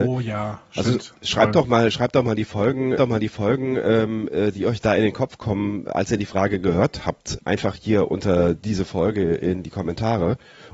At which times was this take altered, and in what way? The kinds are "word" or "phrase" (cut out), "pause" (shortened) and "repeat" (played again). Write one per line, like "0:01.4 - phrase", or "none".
0:03.0 - repeat
0:07.4 - word